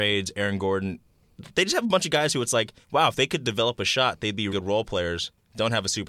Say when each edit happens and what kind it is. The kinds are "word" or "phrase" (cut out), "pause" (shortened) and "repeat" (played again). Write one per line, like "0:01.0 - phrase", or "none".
0:02.8 - pause
0:04.5 - word